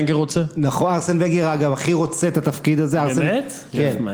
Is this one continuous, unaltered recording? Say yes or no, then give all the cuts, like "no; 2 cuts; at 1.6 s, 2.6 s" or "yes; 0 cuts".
yes; 0 cuts